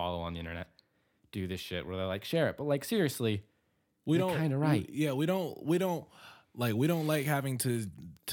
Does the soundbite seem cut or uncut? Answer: uncut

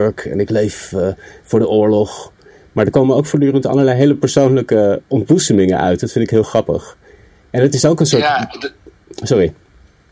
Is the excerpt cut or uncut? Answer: uncut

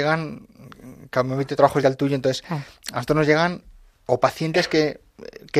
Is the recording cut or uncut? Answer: cut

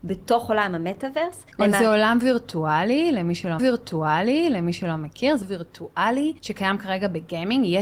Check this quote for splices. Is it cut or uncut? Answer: cut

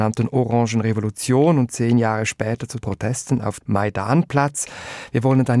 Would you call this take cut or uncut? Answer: cut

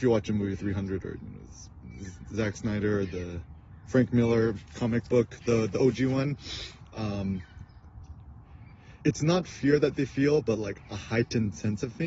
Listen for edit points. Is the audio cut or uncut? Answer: cut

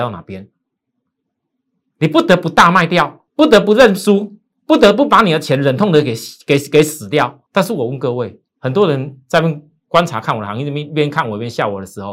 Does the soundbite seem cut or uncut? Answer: cut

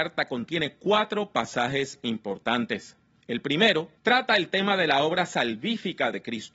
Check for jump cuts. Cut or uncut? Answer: cut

